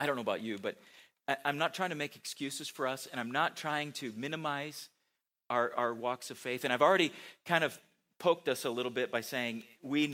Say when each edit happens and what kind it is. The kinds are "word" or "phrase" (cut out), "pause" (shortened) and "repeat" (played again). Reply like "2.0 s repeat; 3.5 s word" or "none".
none